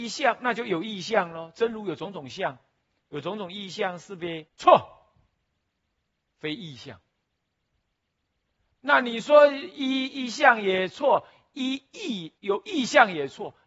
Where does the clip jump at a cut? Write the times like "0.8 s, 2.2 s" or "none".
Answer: 4.5 s, 12.4 s